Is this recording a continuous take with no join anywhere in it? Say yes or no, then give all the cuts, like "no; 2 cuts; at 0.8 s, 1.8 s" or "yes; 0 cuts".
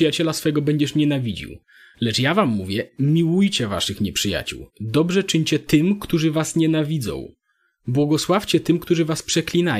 yes; 0 cuts